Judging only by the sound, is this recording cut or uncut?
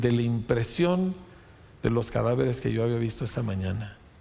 uncut